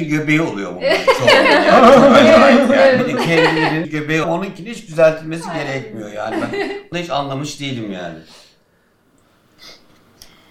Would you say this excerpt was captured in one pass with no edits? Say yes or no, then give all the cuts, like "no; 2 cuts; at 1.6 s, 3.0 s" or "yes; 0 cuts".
no; 3 cuts; at 3.8 s, 4.2 s, 6.9 s